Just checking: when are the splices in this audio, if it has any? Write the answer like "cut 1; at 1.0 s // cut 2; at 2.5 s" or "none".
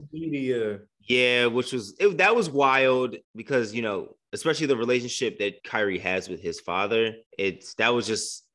cut 1; at 3.2 s // cut 2; at 5.6 s // cut 3; at 7.3 s